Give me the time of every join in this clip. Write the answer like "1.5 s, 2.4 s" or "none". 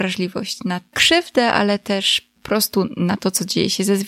0.9 s, 2.4 s